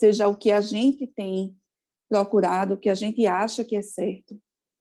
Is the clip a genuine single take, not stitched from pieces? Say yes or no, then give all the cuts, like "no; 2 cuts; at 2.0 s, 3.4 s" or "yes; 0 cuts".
yes; 0 cuts